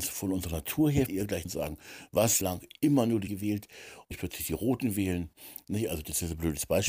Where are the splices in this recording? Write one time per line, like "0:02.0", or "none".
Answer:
0:01.1
0:01.4
0:02.4
0:03.3
0:04.1

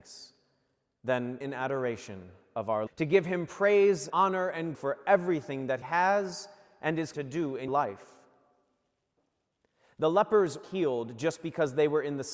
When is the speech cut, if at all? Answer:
0:01.4
0:02.9
0:04.1
0:04.7
0:05.8
0:07.1
0:07.7
0:10.6

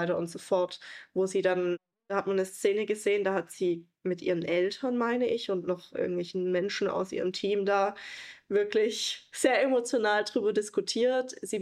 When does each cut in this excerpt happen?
none

